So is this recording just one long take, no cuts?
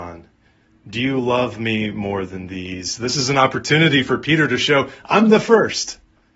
yes; 0 cuts

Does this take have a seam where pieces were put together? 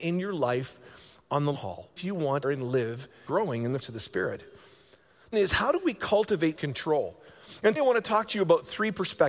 yes; 8 cuts; at 1.5 s, 2.0 s, 2.4 s, 3.3 s, 3.8 s, 5.3 s, 6.6 s, 7.8 s

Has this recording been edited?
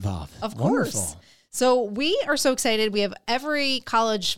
no; 0 cuts

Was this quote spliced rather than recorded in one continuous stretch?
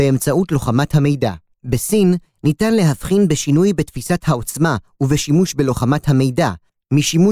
yes; 1 cut; at 1.5 s

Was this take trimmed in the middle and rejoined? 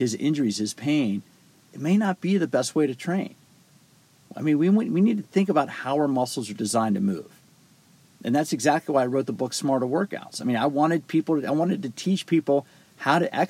no; 0 cuts

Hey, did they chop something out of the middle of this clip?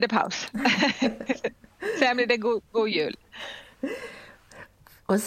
no; 0 cuts

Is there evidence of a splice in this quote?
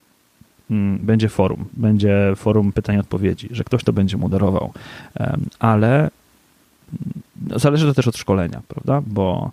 no; 0 cuts

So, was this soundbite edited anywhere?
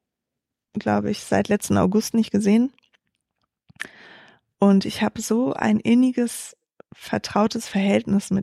no; 0 cuts

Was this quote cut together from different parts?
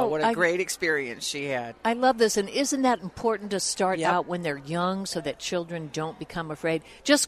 no; 0 cuts

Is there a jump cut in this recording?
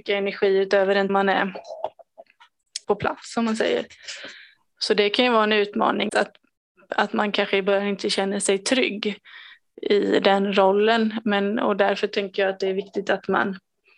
yes; 3 cuts; at 1.1 s, 2.8 s, 6.1 s

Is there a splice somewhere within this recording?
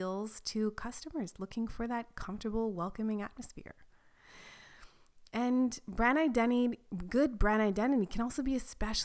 no; 0 cuts

